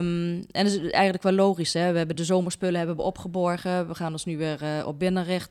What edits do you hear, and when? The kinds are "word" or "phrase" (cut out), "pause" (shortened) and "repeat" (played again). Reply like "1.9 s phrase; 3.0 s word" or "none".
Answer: 2.1 s word